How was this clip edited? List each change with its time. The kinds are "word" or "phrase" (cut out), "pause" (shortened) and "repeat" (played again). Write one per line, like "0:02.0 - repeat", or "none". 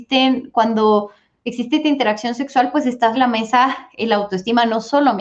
0:03.1 - word